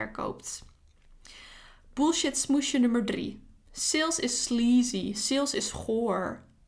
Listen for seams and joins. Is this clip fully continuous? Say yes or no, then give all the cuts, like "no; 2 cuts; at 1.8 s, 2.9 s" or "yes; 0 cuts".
yes; 0 cuts